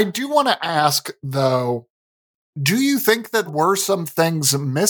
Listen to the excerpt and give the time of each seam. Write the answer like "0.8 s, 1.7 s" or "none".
3.5 s